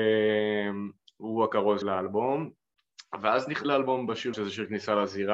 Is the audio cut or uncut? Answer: cut